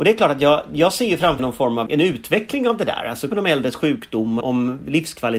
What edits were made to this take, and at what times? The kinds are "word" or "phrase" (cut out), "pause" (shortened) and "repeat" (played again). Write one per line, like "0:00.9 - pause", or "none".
0:01.4 - word
0:01.9 - word
0:03.3 - word
0:04.4 - phrase